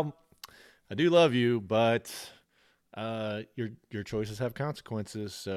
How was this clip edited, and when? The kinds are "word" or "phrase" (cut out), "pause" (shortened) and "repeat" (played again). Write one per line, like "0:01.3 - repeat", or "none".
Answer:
none